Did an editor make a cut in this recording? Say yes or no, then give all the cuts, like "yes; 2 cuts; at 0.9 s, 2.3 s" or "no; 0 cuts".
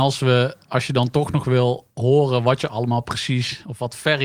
no; 0 cuts